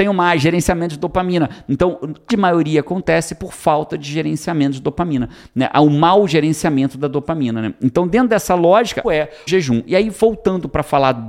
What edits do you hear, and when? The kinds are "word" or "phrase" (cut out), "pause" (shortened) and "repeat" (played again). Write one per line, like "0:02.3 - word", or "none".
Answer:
0:02.3 - word
0:09.0 - word
0:09.5 - word